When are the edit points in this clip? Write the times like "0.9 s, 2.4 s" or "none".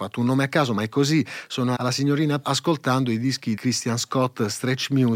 1.8 s, 2.4 s, 3.6 s